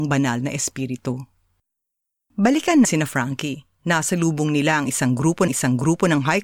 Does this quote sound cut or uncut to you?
cut